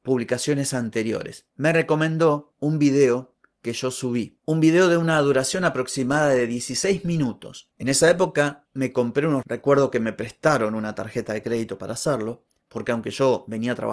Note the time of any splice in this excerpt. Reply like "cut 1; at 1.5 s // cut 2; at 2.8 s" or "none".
cut 1; at 9.4 s